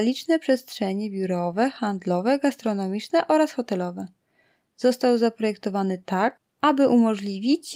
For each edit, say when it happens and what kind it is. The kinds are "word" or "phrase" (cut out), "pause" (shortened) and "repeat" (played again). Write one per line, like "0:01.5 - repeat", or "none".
none